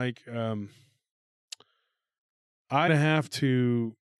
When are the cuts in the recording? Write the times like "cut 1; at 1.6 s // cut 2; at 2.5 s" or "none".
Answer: cut 1; at 2.9 s